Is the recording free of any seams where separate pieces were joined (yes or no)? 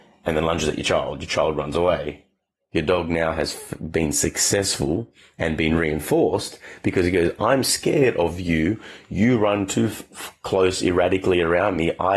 yes